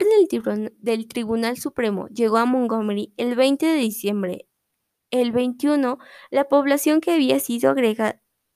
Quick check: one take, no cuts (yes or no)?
yes